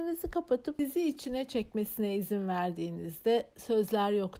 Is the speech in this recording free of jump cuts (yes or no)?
yes